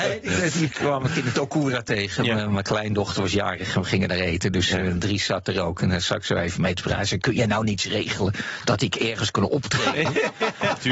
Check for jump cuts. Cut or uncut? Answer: uncut